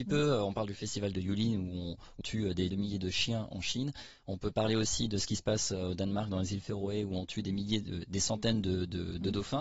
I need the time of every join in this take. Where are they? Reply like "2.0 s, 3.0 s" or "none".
2.2 s, 2.7 s

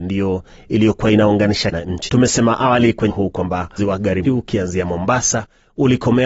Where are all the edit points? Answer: 1.7 s, 2.1 s, 3.1 s, 3.8 s, 4.2 s

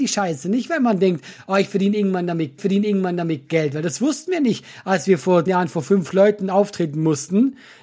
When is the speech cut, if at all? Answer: 2.6 s, 5.5 s

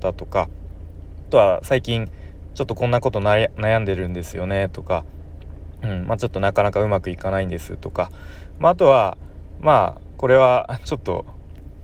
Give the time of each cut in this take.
1.3 s

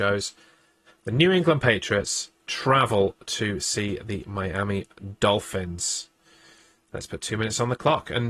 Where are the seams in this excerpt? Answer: 2.4 s

